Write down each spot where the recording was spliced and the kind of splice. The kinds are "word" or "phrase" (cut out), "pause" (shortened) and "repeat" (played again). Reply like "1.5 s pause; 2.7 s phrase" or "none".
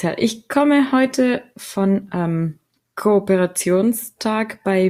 2.1 s word